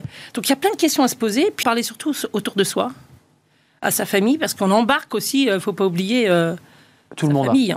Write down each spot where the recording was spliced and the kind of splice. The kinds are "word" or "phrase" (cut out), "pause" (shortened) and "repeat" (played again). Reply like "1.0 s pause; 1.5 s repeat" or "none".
1.6 s word